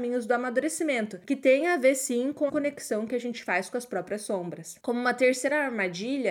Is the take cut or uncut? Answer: cut